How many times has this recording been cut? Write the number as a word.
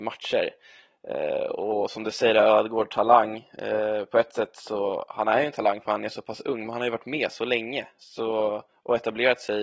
zero